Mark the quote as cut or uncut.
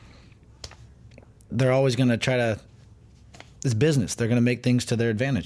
uncut